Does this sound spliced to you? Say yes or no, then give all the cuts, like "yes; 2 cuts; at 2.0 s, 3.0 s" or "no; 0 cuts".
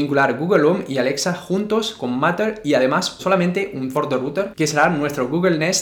yes; 2 cuts; at 3.2 s, 3.9 s